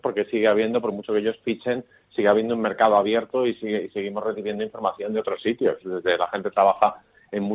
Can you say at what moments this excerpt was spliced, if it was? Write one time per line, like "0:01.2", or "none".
none